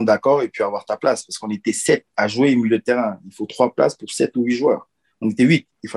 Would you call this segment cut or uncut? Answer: uncut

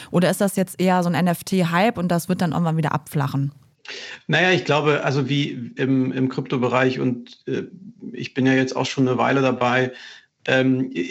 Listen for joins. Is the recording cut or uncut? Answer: cut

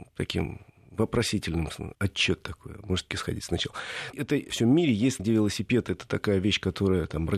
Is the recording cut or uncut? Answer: cut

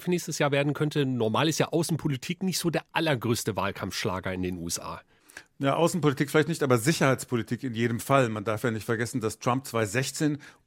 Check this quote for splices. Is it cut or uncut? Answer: uncut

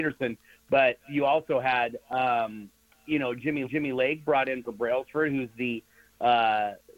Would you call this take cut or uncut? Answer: cut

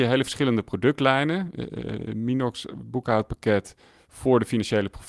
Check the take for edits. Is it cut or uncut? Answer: uncut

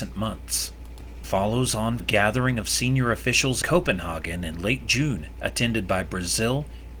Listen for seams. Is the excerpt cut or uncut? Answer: cut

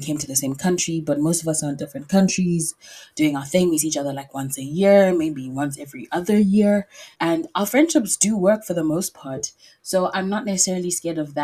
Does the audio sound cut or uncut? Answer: cut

